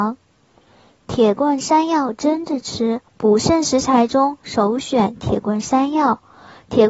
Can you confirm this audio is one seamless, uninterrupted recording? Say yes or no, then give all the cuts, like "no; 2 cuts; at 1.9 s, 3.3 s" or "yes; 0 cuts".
no; 1 cut; at 3.1 s